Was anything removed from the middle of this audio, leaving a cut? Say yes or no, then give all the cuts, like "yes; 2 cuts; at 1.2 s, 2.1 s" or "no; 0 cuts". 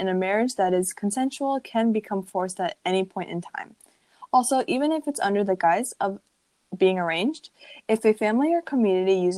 no; 0 cuts